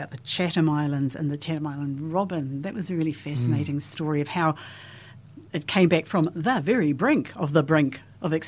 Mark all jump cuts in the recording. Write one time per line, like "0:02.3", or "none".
0:05.5